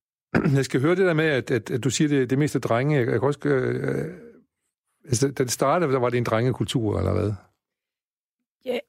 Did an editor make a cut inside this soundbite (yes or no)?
no